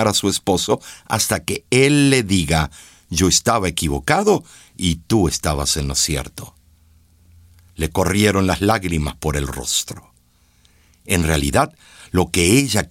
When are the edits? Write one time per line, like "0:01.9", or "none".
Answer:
none